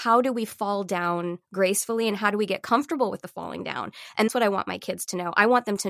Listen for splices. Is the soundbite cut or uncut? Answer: cut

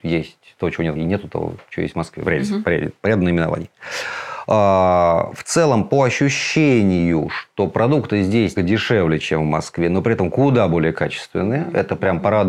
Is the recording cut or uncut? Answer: cut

